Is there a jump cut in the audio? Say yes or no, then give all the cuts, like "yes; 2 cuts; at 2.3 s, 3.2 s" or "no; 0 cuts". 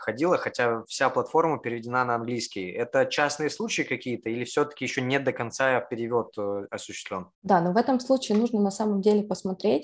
yes; 1 cut; at 7.3 s